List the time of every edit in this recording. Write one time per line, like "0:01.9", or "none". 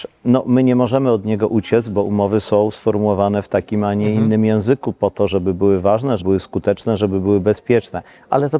0:06.2